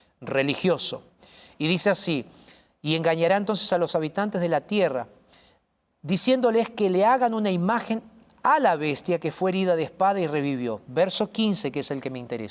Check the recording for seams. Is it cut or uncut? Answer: uncut